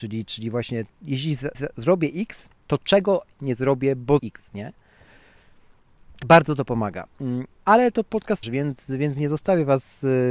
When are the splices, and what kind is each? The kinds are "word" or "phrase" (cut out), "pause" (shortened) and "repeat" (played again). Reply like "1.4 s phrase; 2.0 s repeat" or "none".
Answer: 0.9 s pause; 1.5 s repeat; 2.6 s pause; 3.4 s word; 4.2 s word; 7.5 s pause; 8.4 s phrase